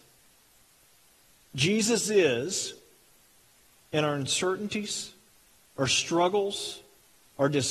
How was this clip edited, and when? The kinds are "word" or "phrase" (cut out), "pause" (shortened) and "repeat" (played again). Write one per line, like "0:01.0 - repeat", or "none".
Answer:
none